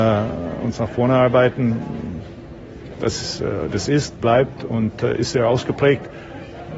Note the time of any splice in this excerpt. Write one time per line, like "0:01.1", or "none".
none